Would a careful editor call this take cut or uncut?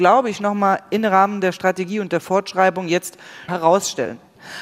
cut